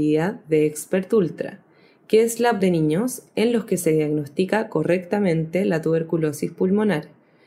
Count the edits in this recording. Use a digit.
1